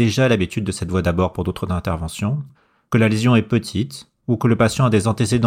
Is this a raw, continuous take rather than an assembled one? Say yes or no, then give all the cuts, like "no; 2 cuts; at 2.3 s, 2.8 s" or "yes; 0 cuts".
yes; 0 cuts